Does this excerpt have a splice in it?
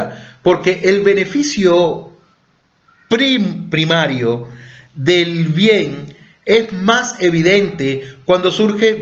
no; 0 cuts

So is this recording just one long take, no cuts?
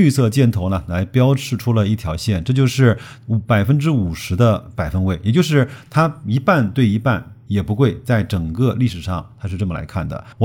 no; 1 cut; at 7.5 s

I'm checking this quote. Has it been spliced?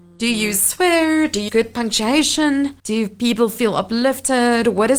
yes; 2 cuts; at 1.5 s, 2.8 s

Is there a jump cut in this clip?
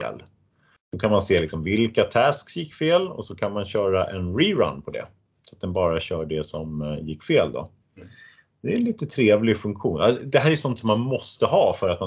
no; 0 cuts

